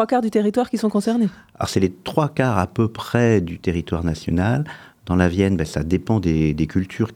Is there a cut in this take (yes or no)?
no